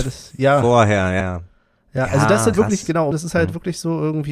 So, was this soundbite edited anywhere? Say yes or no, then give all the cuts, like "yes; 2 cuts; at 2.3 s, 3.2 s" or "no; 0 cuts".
yes; 3 cuts; at 1.2 s, 2.5 s, 3.1 s